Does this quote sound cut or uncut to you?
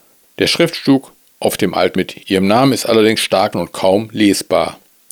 cut